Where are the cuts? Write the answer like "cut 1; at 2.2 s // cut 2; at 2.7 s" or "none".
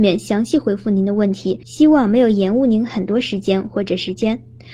cut 1; at 1.6 s